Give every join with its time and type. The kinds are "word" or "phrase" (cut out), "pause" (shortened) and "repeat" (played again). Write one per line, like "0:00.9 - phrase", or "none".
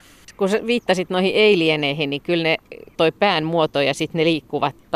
0:03.0 - word